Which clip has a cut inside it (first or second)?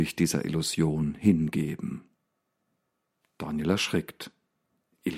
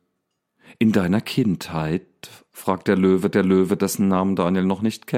second